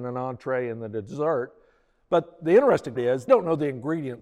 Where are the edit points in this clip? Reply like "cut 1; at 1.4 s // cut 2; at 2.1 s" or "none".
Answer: cut 1; at 3.0 s // cut 2; at 3.3 s